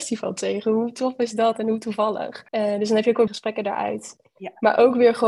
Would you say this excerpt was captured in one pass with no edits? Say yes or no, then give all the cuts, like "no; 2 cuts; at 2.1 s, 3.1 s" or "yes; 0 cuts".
no; 2 cuts; at 2.5 s, 3.3 s